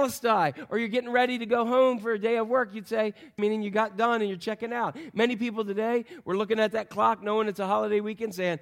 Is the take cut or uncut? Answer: cut